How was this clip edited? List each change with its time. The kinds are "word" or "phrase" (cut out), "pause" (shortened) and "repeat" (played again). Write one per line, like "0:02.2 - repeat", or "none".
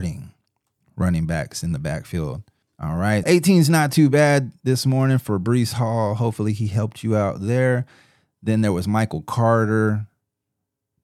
0:02.6 - pause
0:03.2 - word